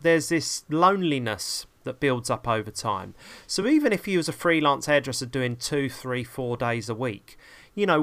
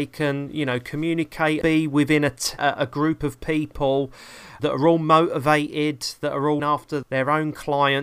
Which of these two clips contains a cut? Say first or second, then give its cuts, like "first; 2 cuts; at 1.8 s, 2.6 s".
second; 5 cuts; at 1.6 s, 2.6 s, 4.6 s, 6.6 s, 7.0 s